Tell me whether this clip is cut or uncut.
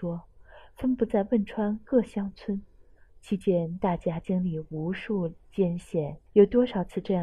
cut